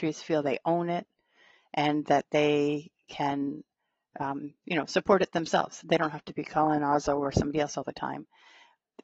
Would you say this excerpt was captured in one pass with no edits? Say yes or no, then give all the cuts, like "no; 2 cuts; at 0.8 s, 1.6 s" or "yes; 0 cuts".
yes; 0 cuts